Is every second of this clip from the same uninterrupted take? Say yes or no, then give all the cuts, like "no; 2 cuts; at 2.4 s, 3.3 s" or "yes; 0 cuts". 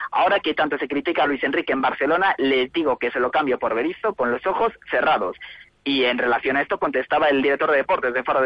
yes; 0 cuts